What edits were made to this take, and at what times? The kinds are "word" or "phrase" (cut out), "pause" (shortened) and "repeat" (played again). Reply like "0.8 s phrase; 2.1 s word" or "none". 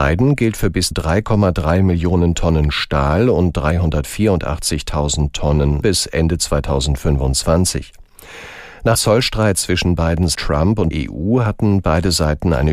0.9 s word; 5.8 s word; 8.9 s word; 10.3 s word; 10.9 s word